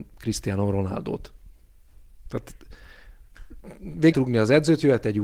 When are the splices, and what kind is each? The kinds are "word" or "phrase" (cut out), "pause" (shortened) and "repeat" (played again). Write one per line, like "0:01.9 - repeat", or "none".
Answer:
0:04.1 - phrase